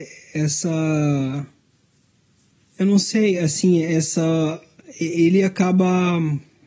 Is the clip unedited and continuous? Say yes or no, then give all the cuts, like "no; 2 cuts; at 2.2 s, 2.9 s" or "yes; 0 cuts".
yes; 0 cuts